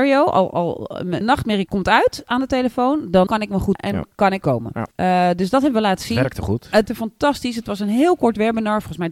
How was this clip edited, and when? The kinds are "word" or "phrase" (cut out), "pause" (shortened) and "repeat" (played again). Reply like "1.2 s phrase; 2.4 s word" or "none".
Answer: 1.2 s word; 1.7 s word; 3.3 s word; 3.7 s word; 4.4 s word; 4.9 s pause; 6.9 s word